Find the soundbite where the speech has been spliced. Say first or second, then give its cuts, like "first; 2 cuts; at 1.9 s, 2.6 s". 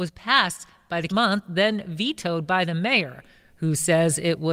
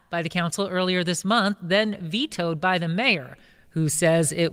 first; 1 cut; at 1.1 s